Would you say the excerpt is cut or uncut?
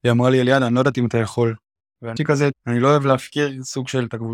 cut